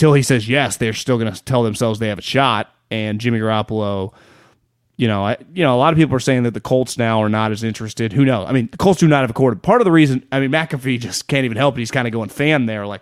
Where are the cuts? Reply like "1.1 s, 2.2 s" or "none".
none